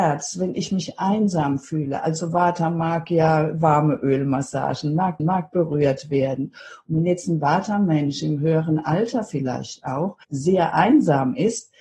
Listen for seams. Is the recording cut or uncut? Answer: cut